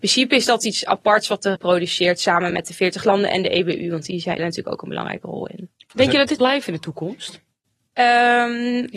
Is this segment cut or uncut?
cut